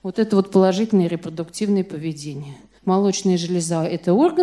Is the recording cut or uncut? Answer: cut